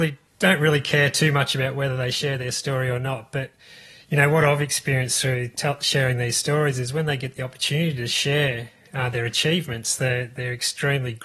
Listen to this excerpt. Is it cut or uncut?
uncut